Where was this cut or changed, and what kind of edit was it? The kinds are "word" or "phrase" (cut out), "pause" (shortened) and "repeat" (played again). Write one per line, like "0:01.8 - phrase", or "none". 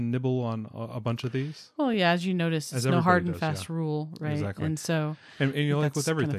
none